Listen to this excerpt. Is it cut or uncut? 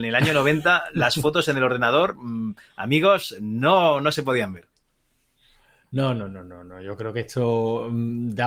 uncut